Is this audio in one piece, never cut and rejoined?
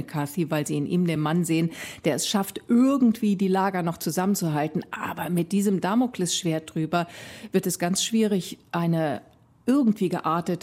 yes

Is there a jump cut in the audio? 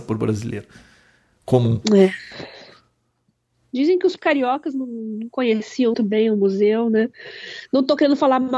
yes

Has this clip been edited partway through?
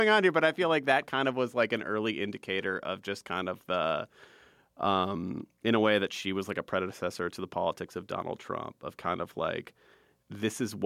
yes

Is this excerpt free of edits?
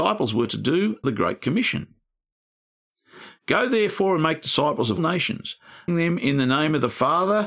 no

